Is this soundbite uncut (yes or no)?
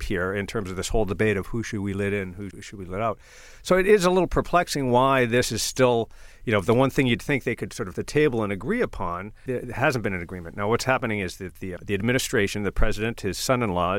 no